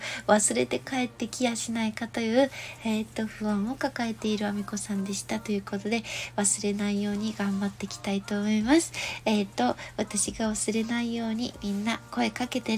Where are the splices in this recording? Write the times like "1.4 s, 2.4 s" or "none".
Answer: none